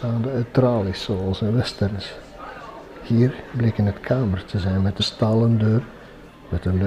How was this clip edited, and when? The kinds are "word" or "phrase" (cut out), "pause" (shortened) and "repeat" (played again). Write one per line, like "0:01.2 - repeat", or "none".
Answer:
0:05.0 - word